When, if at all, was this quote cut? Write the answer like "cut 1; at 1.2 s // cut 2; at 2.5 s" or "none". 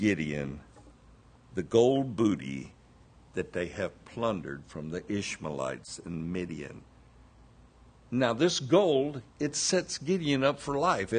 cut 1; at 9.3 s

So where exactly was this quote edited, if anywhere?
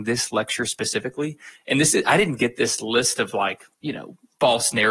none

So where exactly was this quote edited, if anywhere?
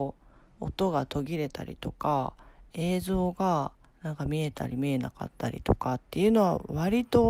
cut 1; at 3.9 s

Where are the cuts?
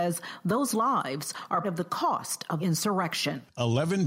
cut 1; at 1.6 s // cut 2; at 2.6 s

